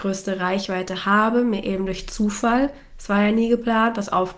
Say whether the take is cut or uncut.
uncut